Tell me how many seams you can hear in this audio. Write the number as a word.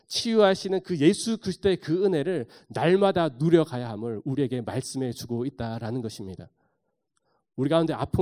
zero